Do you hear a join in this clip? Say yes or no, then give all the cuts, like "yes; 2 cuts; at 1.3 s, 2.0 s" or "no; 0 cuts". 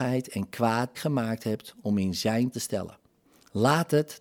yes; 2 cuts; at 0.9 s, 2.5 s